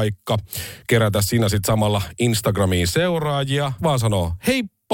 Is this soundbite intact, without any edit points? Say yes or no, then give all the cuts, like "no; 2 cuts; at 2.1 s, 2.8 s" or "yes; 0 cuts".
no; 1 cut; at 3.8 s